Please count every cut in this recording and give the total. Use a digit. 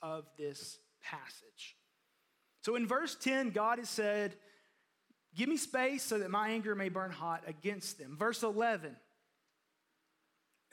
0